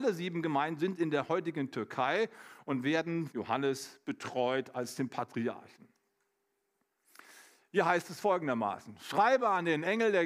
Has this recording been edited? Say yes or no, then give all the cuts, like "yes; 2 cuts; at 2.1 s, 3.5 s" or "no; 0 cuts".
yes; 1 cut; at 3.3 s